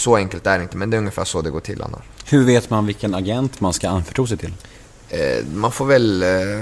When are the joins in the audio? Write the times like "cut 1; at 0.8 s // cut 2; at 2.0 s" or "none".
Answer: none